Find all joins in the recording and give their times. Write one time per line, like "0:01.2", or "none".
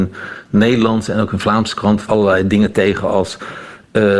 0:02.1